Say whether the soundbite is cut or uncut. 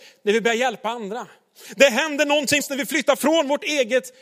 cut